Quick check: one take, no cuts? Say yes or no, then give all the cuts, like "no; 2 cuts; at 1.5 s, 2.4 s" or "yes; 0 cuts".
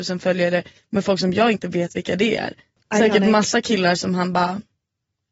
yes; 0 cuts